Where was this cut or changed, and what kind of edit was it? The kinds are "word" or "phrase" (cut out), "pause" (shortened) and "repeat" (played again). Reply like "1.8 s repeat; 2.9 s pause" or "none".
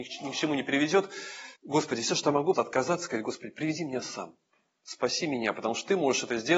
1.6 s pause; 2.5 s word